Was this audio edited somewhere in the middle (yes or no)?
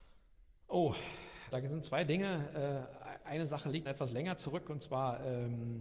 yes